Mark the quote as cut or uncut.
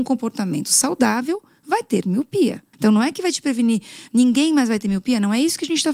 cut